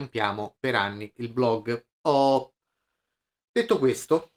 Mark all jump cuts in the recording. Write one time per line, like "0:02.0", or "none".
0:01.1
0:01.9